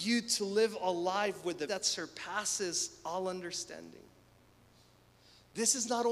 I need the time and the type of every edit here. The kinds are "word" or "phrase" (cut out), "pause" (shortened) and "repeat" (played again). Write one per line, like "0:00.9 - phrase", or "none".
0:01.7 - word